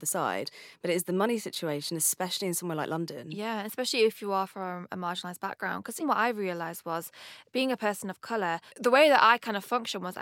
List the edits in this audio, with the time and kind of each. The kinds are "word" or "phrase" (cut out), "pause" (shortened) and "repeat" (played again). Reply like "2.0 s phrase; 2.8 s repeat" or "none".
6.0 s word; 8.7 s pause